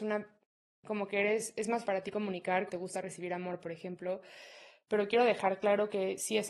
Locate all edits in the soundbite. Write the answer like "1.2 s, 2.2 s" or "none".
1.8 s, 2.7 s